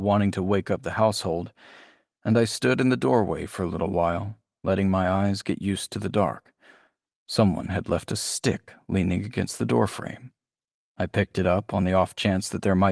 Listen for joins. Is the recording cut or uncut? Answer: uncut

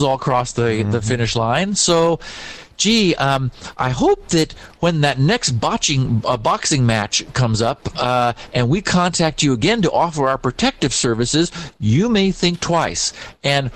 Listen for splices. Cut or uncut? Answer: uncut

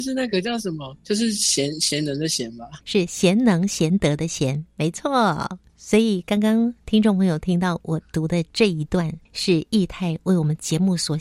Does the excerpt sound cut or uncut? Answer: cut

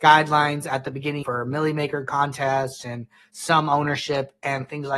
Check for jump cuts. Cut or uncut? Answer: cut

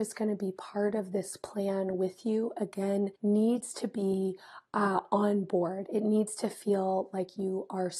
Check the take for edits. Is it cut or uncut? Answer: cut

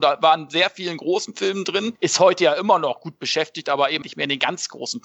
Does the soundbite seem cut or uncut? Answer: cut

